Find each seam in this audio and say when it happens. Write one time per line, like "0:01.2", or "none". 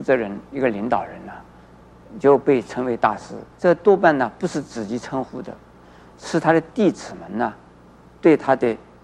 0:03.5